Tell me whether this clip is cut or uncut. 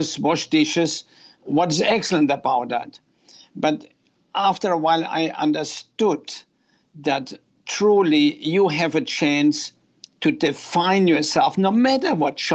uncut